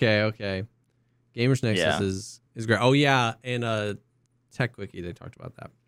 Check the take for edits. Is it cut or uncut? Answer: cut